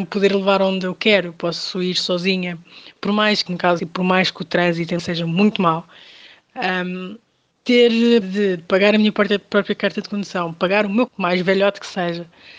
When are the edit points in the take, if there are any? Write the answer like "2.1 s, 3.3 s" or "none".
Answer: 3.5 s, 3.8 s, 5.0 s, 8.2 s, 11.1 s